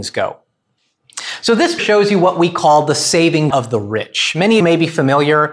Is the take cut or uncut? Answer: cut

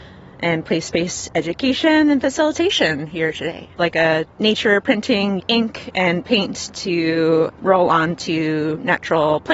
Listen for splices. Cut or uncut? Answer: cut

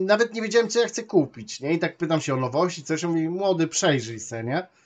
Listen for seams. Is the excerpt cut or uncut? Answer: uncut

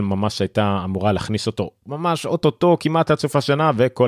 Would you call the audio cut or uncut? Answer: uncut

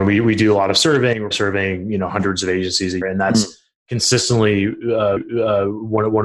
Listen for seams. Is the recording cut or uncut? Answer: cut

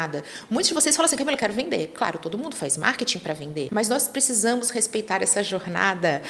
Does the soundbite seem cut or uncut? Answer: uncut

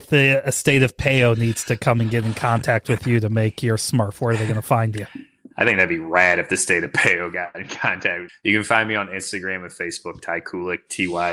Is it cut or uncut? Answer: uncut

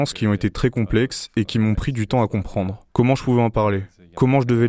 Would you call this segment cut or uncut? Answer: uncut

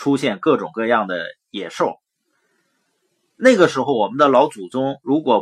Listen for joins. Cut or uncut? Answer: uncut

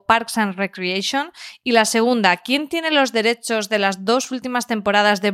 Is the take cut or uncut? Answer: uncut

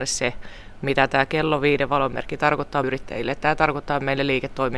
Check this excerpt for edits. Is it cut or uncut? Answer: cut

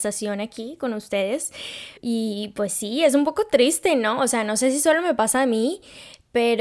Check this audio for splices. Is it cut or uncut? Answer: cut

